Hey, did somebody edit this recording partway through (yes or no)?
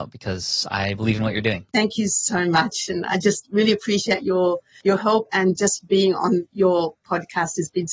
no